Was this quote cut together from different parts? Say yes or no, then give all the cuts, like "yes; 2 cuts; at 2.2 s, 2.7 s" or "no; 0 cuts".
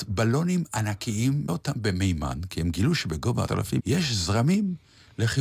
yes; 3 cuts; at 1.5 s, 3.5 s, 3.8 s